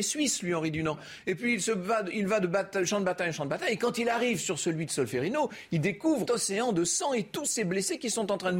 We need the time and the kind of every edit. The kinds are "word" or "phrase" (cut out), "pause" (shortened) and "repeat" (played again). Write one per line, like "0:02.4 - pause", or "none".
0:06.3 - word